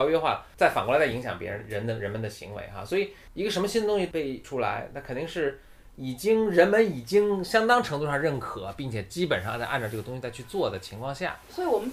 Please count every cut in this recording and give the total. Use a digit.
1